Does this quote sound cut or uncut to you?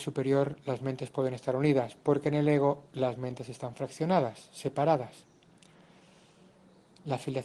uncut